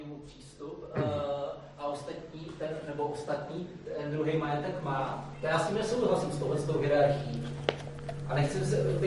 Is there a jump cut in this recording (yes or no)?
no